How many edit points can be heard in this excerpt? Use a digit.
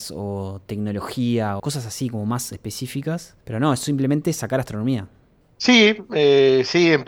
3